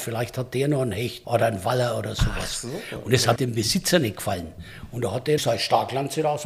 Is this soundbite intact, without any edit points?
no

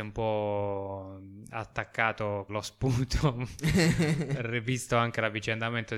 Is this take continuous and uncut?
no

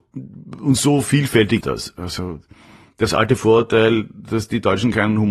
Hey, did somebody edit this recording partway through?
yes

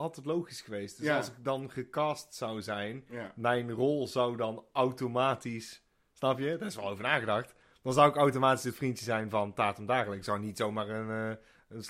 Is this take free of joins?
yes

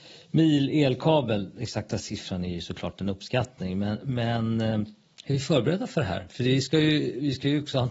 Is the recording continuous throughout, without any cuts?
yes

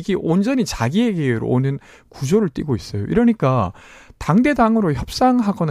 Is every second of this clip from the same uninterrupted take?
yes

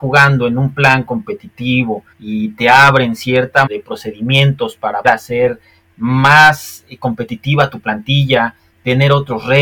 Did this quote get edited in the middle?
yes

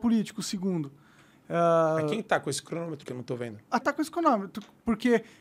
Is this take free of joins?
no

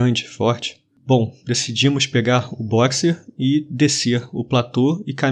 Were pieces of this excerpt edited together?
no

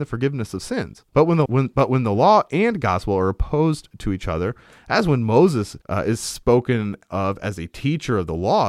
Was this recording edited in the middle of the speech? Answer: yes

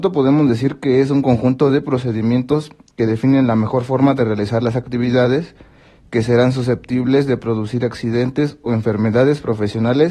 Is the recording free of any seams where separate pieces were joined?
yes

